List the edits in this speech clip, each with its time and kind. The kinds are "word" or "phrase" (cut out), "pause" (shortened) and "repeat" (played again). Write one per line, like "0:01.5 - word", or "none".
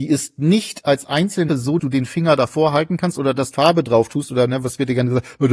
0:01.5 - word
0:01.8 - word
0:03.5 - word

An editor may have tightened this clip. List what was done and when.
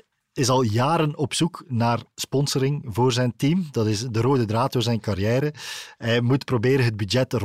none

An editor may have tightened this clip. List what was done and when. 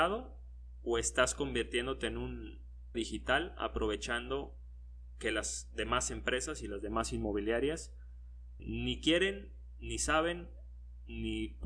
0:02.9 - word
0:08.6 - word

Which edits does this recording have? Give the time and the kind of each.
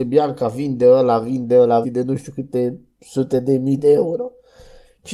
0:01.8 - phrase

